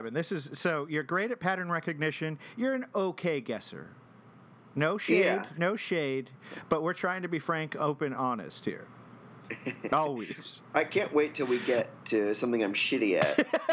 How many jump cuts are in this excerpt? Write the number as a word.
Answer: zero